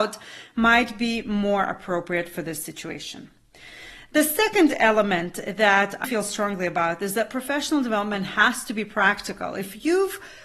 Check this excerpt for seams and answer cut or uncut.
cut